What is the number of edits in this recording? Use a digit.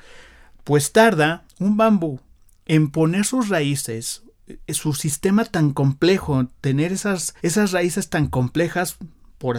2